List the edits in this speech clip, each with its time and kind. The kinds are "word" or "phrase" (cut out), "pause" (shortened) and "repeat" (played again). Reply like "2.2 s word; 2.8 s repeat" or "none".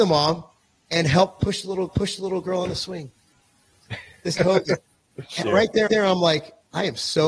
1.9 s repeat; 4.3 s phrase; 5.4 s word; 5.9 s repeat

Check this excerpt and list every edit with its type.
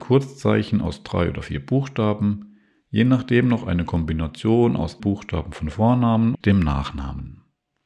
5.0 s word; 6.3 s word

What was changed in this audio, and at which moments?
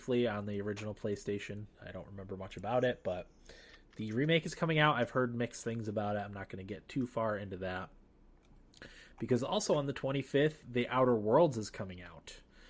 1.7 s pause

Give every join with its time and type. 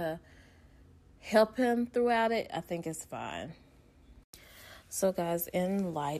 none

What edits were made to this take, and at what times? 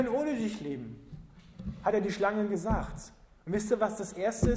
none

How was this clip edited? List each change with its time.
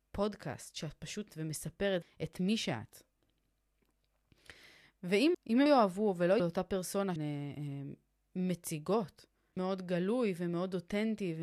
1.3 s word; 2.0 s word; 5.3 s word; 5.7 s word; 6.4 s word; 7.2 s word; 9.6 s word

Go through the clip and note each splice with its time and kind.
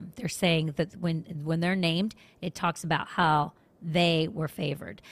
none

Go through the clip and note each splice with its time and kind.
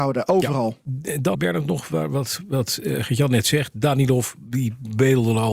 1.3 s word

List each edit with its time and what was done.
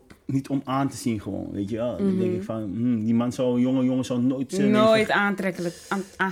none

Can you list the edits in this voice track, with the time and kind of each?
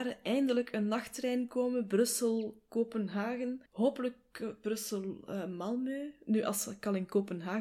3.7 s pause

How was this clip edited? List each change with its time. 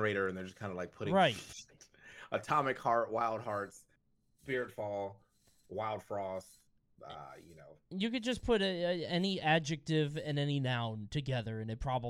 none

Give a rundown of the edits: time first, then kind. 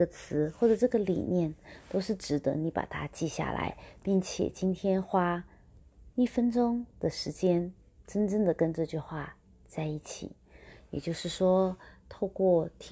none

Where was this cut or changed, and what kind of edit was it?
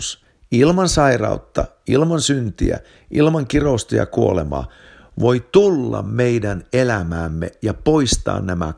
none

